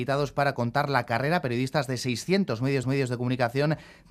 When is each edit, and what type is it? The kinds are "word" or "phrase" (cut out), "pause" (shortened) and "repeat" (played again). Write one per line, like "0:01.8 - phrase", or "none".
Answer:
0:02.8 - repeat